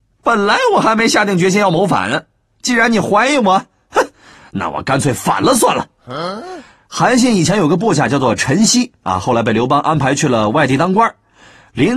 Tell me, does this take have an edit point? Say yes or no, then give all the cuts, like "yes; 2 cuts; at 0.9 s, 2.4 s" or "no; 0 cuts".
no; 0 cuts